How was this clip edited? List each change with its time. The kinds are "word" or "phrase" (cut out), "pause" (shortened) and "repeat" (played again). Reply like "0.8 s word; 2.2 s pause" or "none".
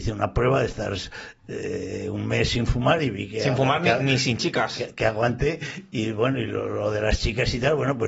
none